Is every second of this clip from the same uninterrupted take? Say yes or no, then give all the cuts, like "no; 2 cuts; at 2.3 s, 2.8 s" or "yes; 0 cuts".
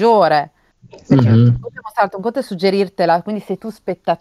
yes; 0 cuts